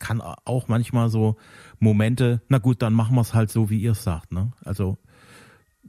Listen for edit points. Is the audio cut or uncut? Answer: uncut